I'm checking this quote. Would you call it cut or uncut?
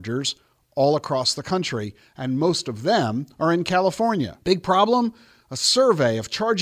cut